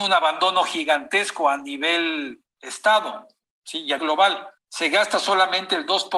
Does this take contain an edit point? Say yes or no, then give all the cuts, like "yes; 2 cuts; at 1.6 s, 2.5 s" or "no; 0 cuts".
yes; 3 cuts; at 2.5 s, 4.0 s, 4.6 s